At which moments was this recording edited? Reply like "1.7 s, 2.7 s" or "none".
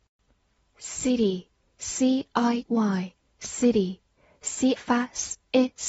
2.7 s, 4.8 s